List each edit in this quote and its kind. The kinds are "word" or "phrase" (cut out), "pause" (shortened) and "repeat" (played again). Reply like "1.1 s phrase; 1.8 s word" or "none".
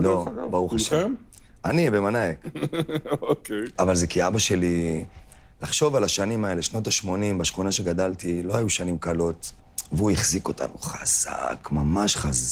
none